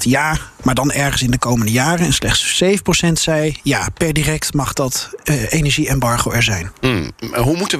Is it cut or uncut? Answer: uncut